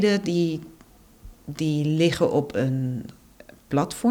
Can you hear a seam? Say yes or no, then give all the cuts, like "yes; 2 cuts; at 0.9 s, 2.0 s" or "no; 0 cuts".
yes; 1 cut; at 1.4 s